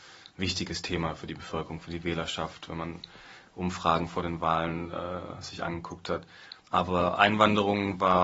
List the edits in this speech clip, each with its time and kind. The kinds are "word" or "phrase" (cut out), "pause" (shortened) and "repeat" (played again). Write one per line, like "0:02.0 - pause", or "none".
0:06.6 - pause